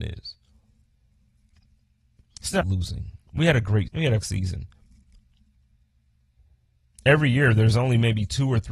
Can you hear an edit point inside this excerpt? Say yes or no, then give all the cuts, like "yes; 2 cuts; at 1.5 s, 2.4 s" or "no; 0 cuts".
yes; 3 cuts; at 2.6 s, 3.9 s, 4.2 s